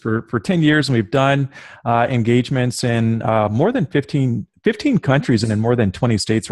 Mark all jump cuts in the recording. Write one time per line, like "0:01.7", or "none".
none